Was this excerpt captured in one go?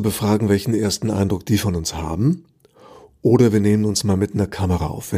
yes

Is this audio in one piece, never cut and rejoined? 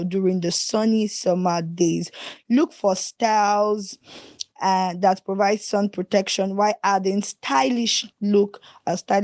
no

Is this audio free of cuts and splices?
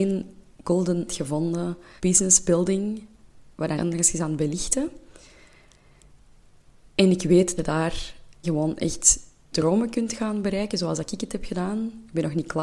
no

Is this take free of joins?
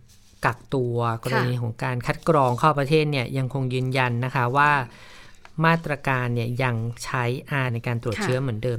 no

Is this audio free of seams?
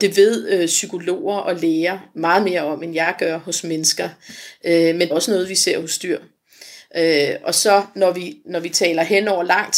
no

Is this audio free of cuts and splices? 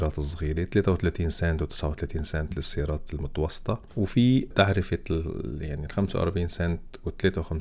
yes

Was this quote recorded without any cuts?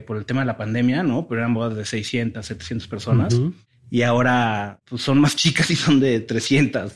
yes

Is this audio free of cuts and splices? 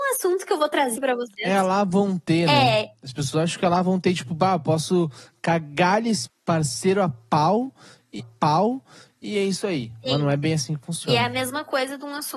no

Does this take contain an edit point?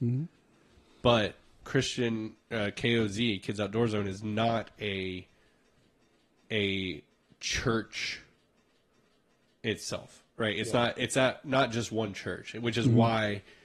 no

